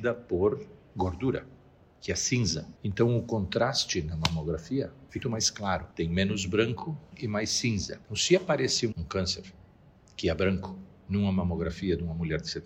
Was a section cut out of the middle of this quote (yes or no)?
yes